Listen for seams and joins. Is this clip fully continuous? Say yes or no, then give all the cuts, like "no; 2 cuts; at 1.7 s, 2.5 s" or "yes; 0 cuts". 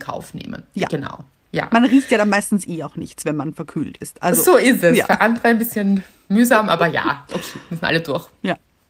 yes; 0 cuts